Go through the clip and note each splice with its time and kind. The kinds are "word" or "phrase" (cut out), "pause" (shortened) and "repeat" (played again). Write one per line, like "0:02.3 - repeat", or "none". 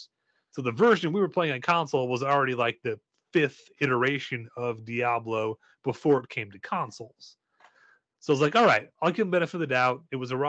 none

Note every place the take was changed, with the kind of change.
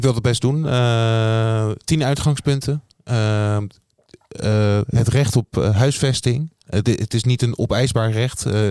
none

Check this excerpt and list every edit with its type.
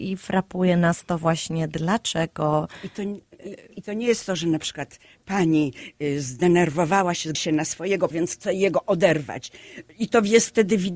0:03.7 - word
0:07.3 - word
0:08.1 - word

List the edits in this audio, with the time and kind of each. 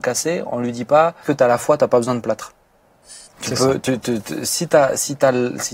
0:01.2 - word
0:03.3 - pause

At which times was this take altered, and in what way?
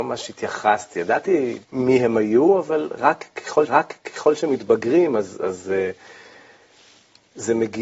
0:01.6 - pause
0:03.7 - repeat

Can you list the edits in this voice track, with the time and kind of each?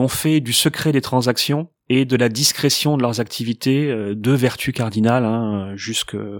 0:01.8 - pause

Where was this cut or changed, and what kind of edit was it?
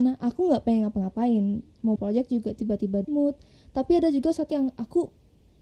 0:02.0 - word
0:03.0 - word
0:04.5 - word

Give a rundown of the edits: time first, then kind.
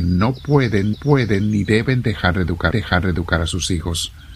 0:00.9 - repeat
0:02.7 - repeat

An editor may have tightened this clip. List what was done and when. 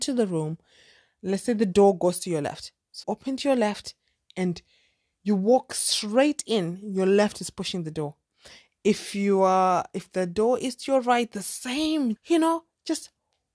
0:03.0 - word
0:12.2 - word

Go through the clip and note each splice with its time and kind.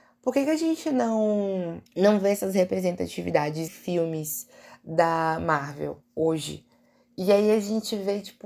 0:01.9 - pause
0:03.7 - word
0:06.0 - pause

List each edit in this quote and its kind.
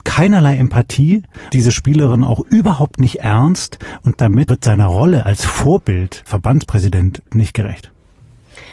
0:01.5 - word
0:04.1 - word
0:04.5 - word
0:06.3 - word
0:07.3 - word

